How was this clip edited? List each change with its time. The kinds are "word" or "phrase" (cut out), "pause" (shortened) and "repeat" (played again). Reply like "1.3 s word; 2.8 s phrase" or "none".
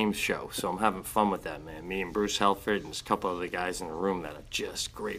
none